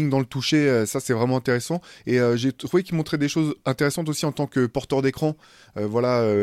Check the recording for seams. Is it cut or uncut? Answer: uncut